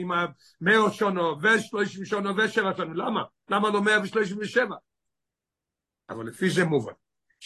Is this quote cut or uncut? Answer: uncut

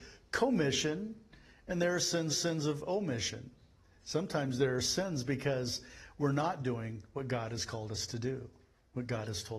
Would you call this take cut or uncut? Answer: cut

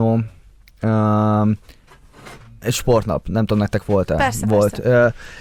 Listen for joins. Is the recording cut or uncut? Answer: uncut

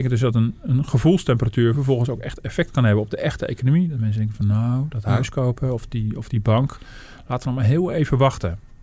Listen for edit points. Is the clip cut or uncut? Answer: uncut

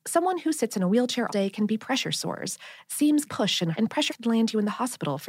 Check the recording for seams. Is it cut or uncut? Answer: cut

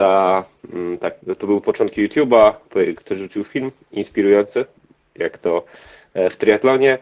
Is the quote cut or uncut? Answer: cut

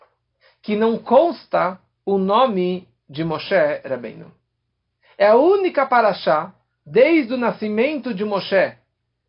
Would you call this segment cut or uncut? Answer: uncut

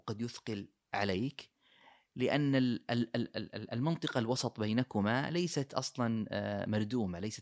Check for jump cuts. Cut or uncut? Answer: uncut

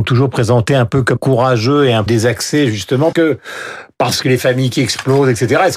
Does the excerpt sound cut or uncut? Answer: cut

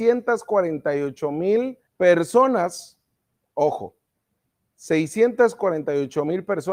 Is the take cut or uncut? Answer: cut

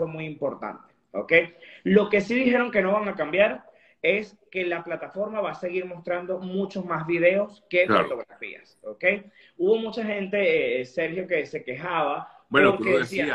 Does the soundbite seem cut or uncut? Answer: uncut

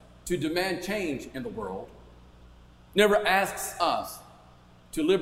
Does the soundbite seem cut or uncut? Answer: uncut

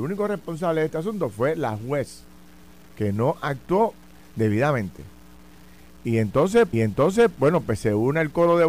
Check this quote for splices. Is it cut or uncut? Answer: cut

